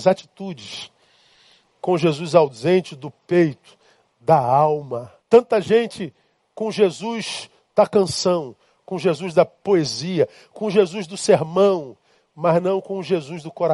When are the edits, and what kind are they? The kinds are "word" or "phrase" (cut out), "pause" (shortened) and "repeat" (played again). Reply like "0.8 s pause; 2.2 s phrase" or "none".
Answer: 5.2 s pause

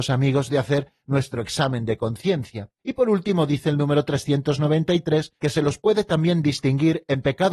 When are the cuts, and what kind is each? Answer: 2.8 s pause; 5.4 s pause

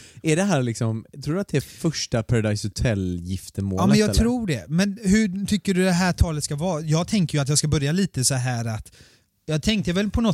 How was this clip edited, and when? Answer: none

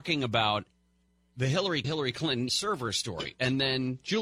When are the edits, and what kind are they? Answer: 1.1 s pause; 1.8 s phrase; 2.5 s word

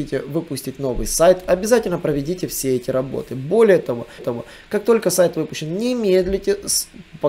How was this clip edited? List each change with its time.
4.2 s repeat

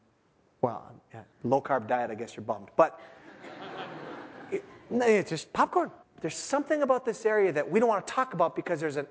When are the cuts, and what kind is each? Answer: 1.3 s pause; 6.0 s pause

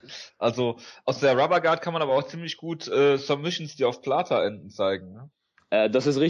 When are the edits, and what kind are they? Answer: none

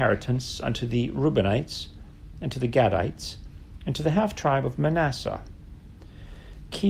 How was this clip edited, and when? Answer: none

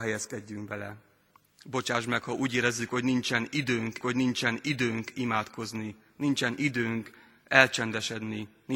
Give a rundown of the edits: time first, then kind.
4.0 s repeat

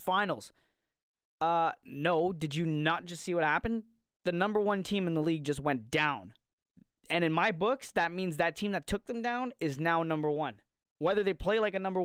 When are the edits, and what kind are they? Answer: none

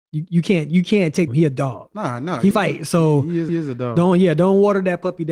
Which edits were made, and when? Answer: 1.3 s phrase; 2.5 s phrase; 3.5 s repeat

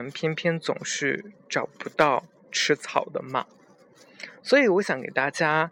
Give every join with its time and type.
none

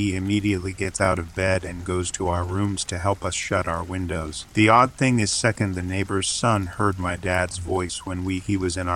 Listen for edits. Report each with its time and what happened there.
4.5 s pause

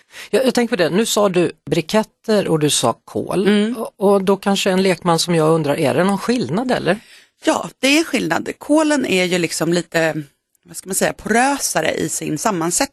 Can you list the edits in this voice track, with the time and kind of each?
none

